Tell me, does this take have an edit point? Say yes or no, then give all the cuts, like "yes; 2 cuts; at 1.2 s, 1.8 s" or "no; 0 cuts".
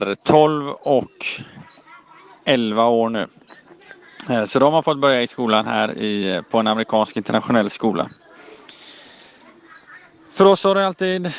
no; 0 cuts